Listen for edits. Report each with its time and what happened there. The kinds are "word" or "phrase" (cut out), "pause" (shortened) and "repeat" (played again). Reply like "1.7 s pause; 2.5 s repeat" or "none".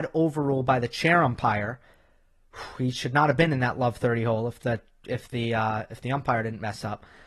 none